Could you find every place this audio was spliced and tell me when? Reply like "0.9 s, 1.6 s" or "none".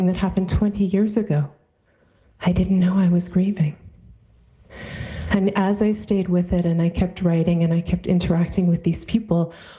none